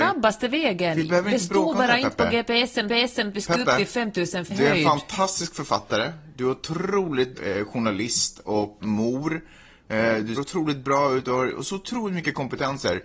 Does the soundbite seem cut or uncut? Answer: cut